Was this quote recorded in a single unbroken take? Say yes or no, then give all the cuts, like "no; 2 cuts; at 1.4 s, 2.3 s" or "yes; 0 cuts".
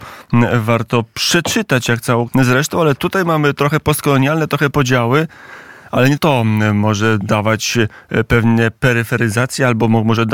no; 3 cuts; at 2.3 s, 4.7 s, 6.2 s